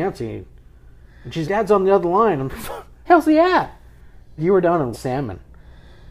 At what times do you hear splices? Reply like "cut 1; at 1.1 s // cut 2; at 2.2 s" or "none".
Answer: cut 1; at 1.4 s // cut 2; at 3.1 s // cut 3; at 4.4 s // cut 4; at 4.9 s